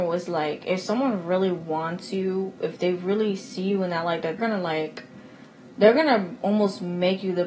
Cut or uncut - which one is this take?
cut